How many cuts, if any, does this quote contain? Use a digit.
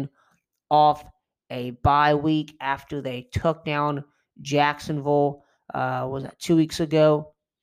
0